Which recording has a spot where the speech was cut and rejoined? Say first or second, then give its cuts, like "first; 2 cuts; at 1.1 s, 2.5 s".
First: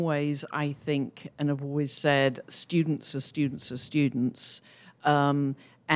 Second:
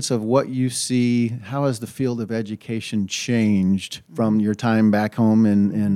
second; 1 cut; at 4.0 s